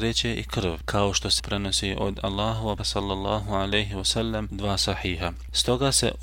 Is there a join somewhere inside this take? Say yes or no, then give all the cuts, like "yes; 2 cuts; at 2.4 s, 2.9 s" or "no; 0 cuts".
yes; 3 cuts; at 1.4 s, 2.8 s, 4.5 s